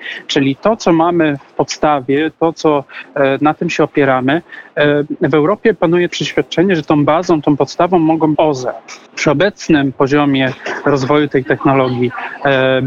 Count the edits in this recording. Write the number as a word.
three